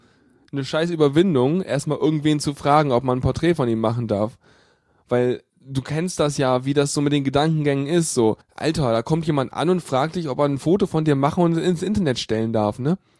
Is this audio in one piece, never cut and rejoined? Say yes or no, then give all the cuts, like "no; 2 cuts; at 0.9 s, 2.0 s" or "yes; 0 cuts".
no; 2 cuts; at 5.5 s, 8.4 s